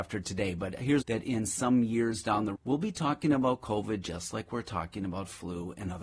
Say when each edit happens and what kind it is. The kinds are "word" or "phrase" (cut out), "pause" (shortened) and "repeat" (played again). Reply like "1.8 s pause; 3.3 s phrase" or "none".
1.0 s phrase; 2.6 s word